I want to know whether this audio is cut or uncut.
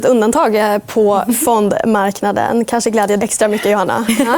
cut